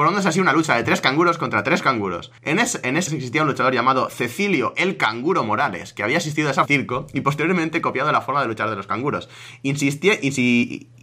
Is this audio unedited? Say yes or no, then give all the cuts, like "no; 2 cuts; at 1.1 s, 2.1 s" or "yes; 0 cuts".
no; 3 cuts; at 2.4 s, 3.1 s, 6.6 s